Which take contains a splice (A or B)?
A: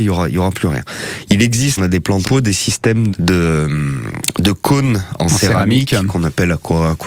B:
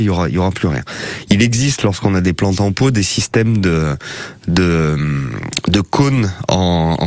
A